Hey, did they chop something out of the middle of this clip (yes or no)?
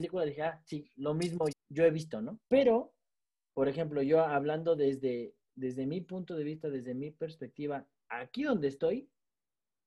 yes